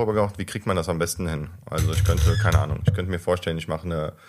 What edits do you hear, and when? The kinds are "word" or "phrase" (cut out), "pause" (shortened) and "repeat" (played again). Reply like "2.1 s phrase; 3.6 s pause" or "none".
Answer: none